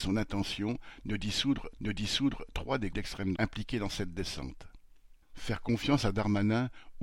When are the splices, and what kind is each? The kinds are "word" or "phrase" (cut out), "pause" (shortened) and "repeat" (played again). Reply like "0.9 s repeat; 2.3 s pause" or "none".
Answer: 1.8 s repeat; 2.9 s word; 3.4 s word; 5.2 s pause